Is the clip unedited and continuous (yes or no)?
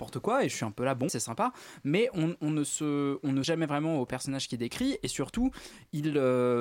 no